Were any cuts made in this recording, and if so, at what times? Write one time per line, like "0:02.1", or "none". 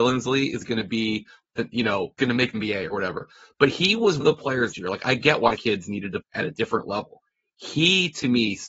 0:02.2
0:02.5
0:04.2
0:04.7
0:05.6
0:06.2

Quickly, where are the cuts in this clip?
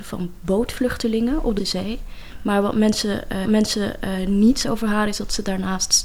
0:01.6
0:03.4
0:04.6

